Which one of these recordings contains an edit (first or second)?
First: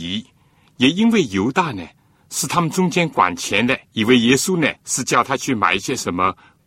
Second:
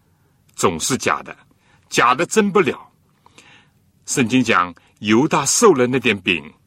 first